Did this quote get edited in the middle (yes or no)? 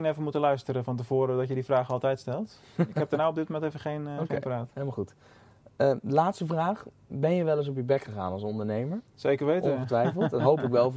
no